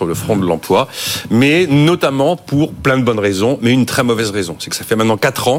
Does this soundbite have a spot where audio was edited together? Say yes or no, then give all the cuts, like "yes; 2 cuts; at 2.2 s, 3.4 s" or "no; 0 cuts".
no; 0 cuts